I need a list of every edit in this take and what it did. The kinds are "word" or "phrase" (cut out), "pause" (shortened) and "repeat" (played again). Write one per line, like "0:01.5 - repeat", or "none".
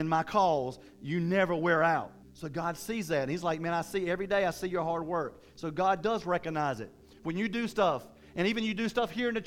0:02.2 - pause